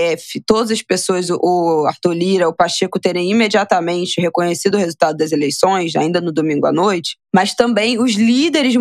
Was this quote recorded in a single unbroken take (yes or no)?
yes